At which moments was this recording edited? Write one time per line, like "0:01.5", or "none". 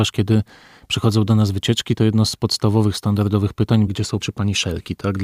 0:03.9
0:04.2